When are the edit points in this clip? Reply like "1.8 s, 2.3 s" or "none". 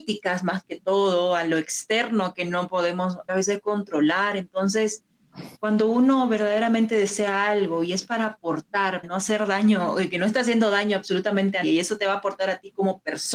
3.3 s, 5.6 s, 9.0 s, 11.6 s

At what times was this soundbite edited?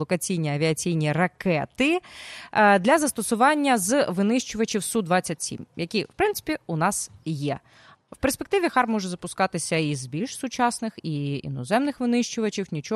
none

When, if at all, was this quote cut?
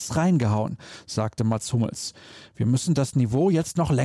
none

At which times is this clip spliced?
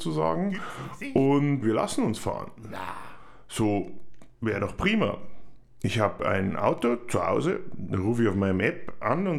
1.6 s

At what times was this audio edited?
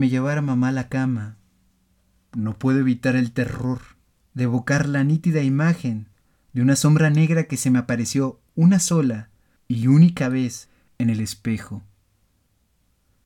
none

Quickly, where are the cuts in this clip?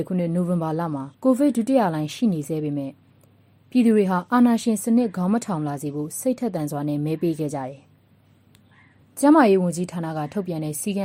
1.1 s

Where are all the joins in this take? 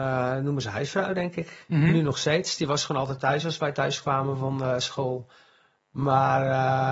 none

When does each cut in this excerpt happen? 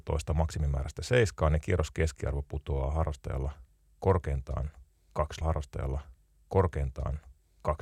5.4 s

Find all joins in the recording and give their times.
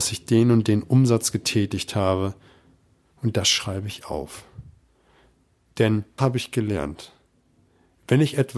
6.2 s

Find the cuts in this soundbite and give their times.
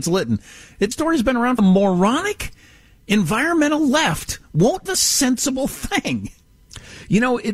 0.9 s, 1.6 s, 4.9 s

